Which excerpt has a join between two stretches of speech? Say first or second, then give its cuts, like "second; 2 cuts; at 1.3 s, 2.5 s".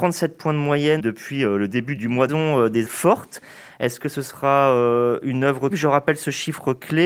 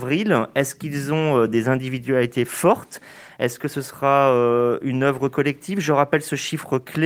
first; 5 cuts; at 1.0 s, 2.0 s, 2.3 s, 2.9 s, 5.7 s